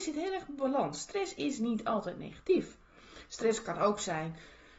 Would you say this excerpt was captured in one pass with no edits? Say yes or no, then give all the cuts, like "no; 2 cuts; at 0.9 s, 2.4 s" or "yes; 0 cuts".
yes; 0 cuts